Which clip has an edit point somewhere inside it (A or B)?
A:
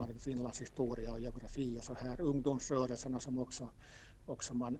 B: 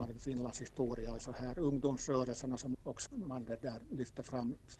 B